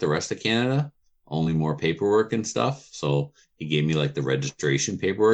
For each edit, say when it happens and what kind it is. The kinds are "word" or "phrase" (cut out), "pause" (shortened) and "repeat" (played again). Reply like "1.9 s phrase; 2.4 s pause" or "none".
none